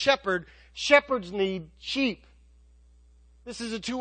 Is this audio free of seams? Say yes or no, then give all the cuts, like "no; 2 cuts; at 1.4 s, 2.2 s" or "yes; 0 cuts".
yes; 0 cuts